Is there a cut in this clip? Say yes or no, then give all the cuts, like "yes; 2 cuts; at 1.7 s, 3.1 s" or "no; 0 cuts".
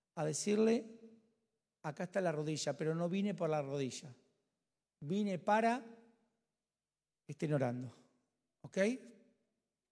no; 0 cuts